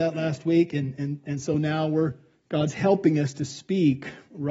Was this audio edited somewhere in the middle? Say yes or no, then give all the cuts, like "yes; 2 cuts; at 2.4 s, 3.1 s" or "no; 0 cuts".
no; 0 cuts